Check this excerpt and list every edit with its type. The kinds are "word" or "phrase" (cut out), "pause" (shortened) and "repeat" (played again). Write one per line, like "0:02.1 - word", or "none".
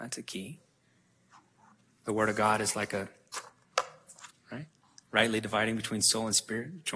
0:04.3 - word

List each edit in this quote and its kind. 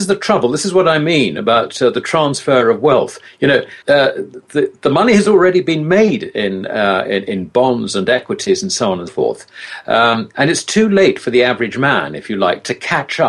0:03.8 - pause
0:09.1 - word

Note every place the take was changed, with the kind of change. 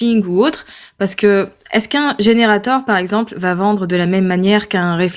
none

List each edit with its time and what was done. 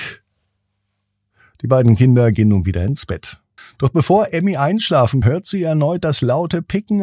0:03.6 - pause
0:05.2 - word

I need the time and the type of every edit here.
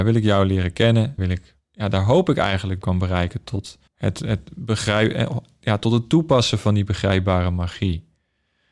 0:01.2 - phrase
0:01.6 - pause
0:02.8 - phrase
0:03.9 - pause

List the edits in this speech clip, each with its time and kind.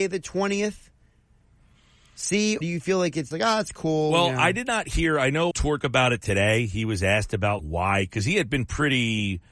0:02.6 - word
0:03.3 - word
0:05.5 - word
0:05.8 - word
0:07.6 - word

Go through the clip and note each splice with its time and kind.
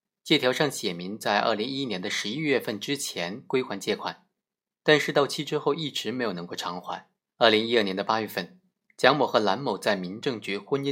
0:07.2 - pause

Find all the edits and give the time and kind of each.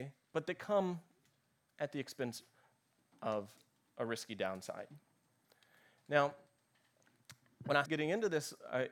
0:07.9 - word

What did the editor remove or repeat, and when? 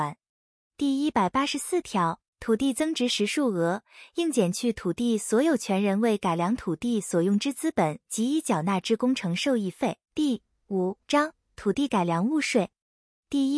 0:02.3 - pause
0:10.0 - pause
0:11.0 - pause

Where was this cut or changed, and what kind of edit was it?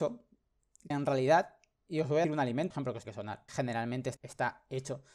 0:00.9 - word
0:02.2 - word
0:02.7 - word
0:03.0 - word
0:03.5 - word
0:04.2 - word

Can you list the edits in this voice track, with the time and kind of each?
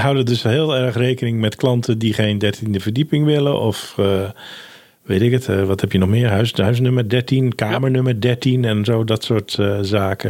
none

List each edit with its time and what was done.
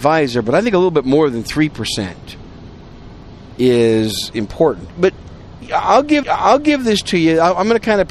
0:04.9 - word
0:06.2 - repeat

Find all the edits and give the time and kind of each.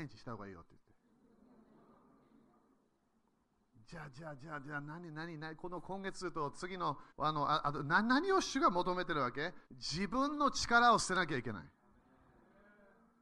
0:07.1 - pause
0:09.7 - pause

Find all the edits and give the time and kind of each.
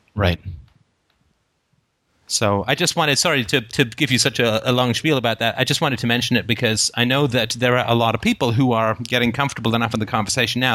none

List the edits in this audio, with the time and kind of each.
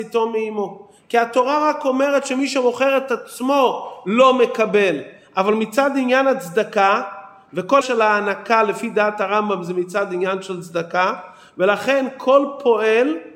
0:07.8 - word

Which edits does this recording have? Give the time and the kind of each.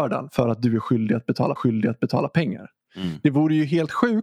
0:01.6 - repeat

